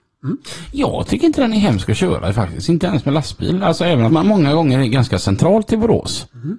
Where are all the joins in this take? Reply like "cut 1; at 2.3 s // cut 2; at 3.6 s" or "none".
cut 1; at 4.1 s